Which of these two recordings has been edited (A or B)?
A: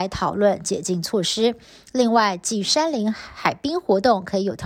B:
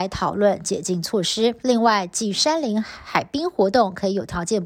B